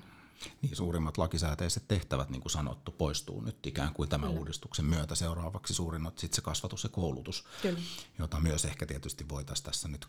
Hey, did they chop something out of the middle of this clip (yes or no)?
no